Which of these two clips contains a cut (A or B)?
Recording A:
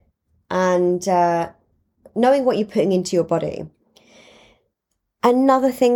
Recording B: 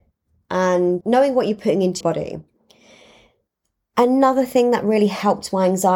B